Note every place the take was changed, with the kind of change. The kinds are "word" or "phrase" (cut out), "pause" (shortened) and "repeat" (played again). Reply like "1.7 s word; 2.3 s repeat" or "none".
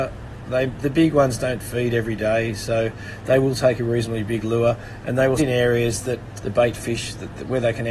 5.4 s word; 6.4 s word